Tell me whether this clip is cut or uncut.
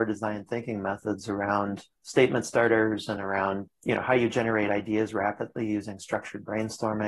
uncut